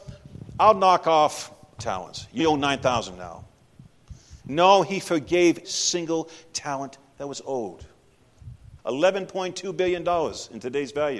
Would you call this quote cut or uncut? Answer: cut